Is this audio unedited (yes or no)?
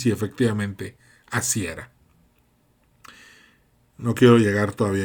yes